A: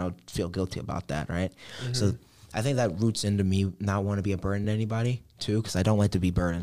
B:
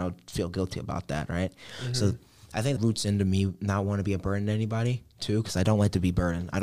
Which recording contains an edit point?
B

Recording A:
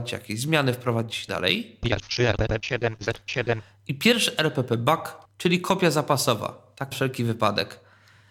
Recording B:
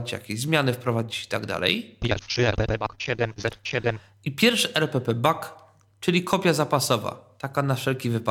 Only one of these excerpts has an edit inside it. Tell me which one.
A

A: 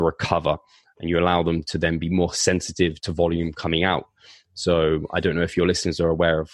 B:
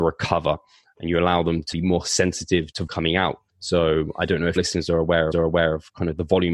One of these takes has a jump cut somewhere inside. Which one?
B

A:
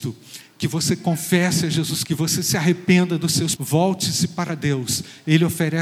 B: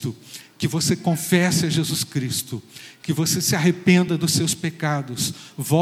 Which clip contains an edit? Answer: A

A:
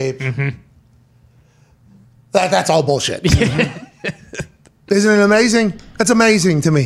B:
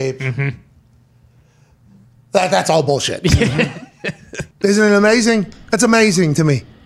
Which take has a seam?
B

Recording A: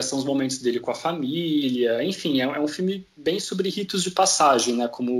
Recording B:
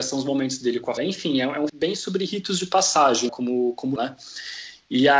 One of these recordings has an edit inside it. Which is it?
B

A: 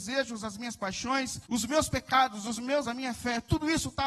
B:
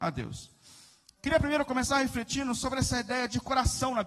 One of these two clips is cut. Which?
A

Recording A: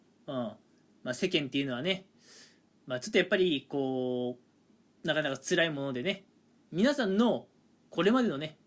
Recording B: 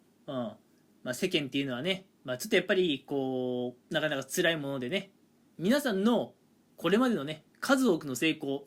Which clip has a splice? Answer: B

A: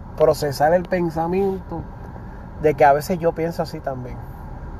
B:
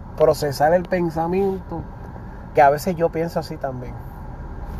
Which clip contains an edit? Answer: B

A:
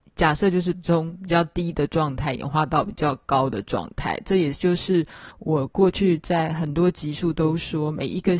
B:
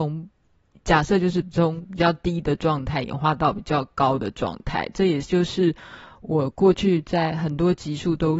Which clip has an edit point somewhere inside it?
A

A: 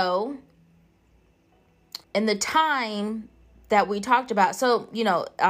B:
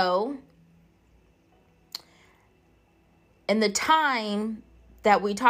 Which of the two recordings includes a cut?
A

